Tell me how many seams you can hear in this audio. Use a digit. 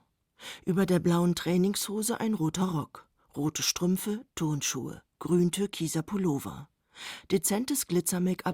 0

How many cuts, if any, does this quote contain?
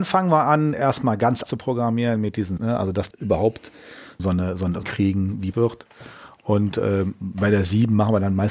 6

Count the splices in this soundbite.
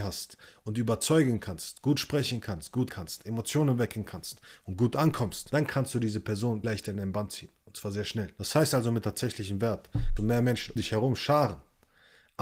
5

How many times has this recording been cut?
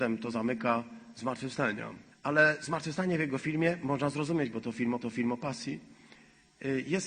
2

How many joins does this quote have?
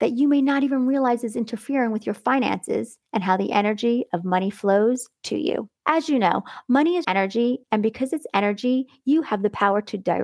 2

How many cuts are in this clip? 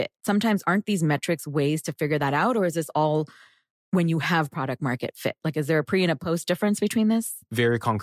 0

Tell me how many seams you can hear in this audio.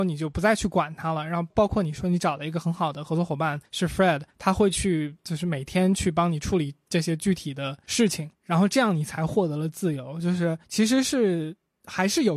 4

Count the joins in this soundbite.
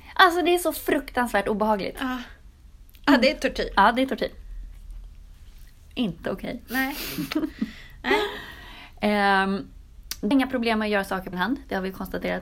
2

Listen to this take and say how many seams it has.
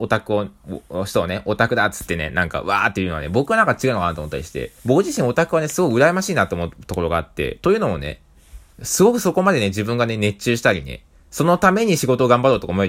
1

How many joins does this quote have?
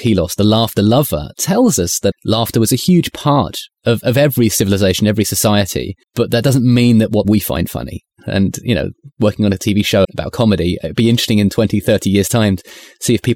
4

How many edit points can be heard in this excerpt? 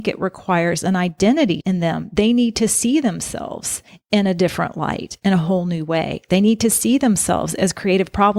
2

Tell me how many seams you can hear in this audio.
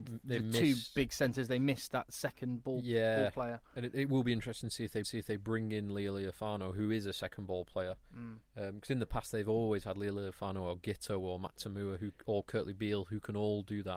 1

